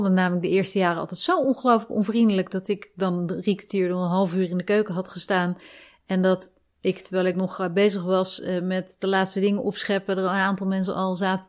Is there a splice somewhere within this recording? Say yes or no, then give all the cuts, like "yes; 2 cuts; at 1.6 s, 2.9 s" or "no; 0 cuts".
no; 0 cuts